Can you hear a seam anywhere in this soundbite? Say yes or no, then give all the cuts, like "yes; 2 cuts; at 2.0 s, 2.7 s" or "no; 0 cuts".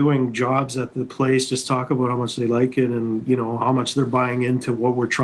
no; 0 cuts